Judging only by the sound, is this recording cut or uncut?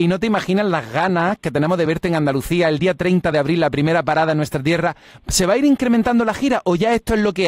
uncut